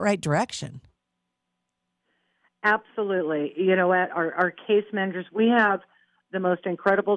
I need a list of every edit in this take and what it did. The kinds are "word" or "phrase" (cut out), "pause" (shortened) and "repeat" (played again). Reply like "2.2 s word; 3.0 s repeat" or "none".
none